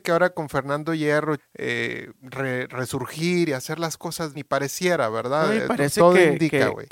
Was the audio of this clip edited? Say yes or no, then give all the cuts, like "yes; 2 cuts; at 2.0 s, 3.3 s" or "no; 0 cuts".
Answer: yes; 2 cuts; at 1.4 s, 4.3 s